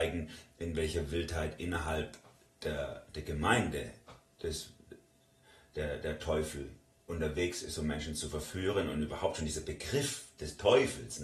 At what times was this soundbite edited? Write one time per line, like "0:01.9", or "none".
none